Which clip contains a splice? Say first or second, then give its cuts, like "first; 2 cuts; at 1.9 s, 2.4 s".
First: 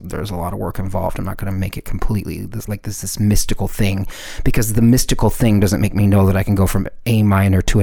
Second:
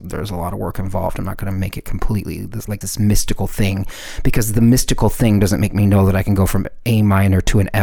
second; 1 cut; at 2.8 s